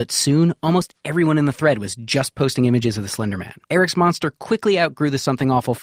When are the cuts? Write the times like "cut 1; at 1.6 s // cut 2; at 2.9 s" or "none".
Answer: cut 1; at 3.6 s